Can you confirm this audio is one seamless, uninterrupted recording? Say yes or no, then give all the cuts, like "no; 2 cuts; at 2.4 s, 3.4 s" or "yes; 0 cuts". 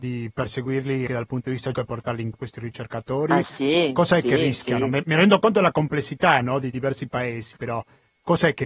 no; 3 cuts; at 1.1 s, 1.7 s, 2.3 s